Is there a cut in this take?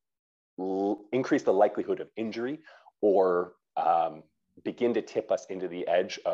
no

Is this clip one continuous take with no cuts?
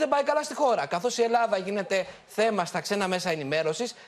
yes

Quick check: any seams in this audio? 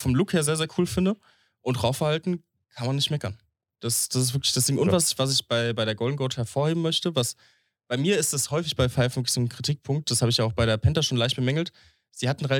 no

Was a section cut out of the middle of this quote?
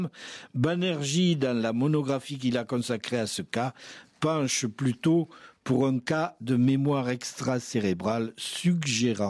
no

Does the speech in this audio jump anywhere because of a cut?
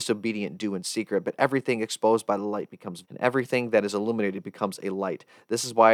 yes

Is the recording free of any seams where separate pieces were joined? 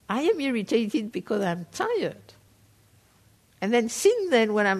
yes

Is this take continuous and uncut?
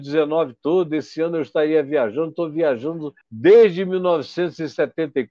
no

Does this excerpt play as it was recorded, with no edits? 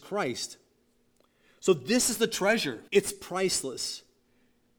no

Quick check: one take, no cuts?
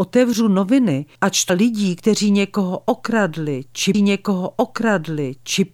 no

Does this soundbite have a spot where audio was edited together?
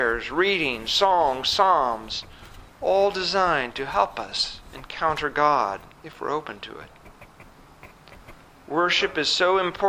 yes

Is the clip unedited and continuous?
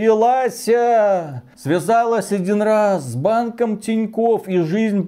yes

